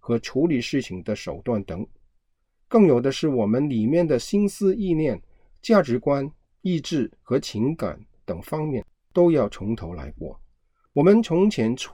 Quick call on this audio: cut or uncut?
uncut